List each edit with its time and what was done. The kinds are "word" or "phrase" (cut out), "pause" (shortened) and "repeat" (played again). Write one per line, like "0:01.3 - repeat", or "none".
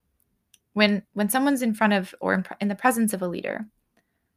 0:01.1 - pause